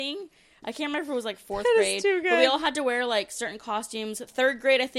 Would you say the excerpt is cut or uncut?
uncut